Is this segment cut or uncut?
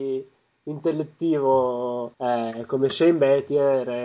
cut